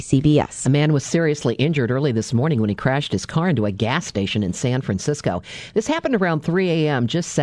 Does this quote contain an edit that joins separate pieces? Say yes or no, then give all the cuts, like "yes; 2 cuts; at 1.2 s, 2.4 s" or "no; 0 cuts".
no; 0 cuts